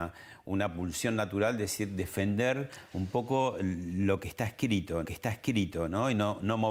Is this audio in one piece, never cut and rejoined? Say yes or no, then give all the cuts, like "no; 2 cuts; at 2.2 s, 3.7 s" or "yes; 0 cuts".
no; 1 cut; at 5.0 s